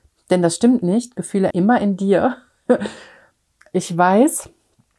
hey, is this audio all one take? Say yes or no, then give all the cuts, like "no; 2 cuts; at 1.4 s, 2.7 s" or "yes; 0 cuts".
no; 1 cut; at 1.5 s